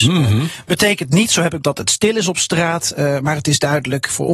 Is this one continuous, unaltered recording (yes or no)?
no